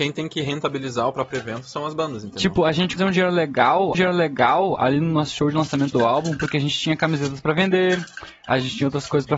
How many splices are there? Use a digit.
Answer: 2